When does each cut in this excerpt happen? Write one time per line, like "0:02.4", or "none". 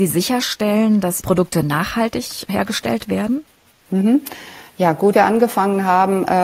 0:01.2
0:05.1